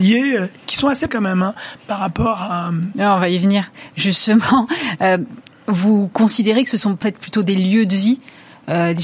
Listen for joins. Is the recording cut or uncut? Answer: cut